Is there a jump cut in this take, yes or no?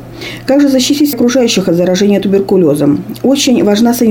yes